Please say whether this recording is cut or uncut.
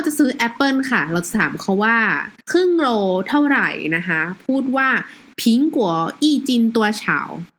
cut